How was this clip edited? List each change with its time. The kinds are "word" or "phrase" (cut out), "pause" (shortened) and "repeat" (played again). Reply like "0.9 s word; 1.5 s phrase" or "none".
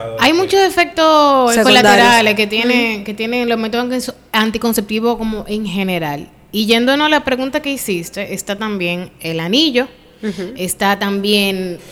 none